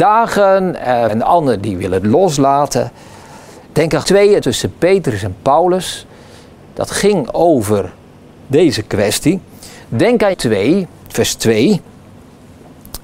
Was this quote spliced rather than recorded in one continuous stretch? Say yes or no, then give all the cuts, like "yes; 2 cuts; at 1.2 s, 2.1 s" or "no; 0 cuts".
yes; 6 cuts; at 1.1 s, 1.6 s, 4.0 s, 4.4 s, 8.4 s, 10.3 s